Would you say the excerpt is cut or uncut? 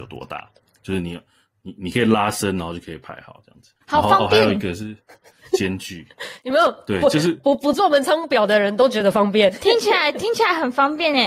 cut